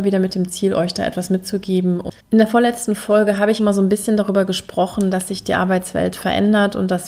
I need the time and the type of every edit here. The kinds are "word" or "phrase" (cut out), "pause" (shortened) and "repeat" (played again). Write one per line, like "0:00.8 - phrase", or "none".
0:02.2 - pause
0:03.6 - word